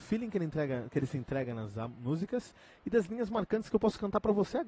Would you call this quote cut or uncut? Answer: uncut